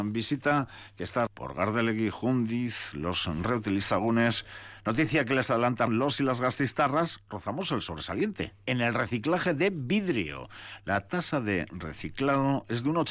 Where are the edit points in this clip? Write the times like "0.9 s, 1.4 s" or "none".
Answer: 1.3 s, 5.9 s